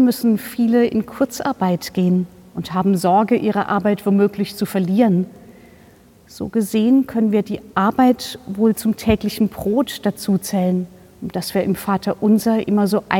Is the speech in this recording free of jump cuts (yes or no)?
yes